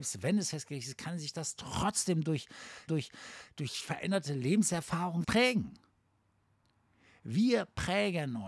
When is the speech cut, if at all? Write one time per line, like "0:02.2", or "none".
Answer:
0:02.9
0:05.2